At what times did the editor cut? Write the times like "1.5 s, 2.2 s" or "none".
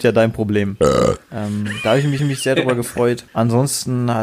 1.2 s, 2.2 s, 3.3 s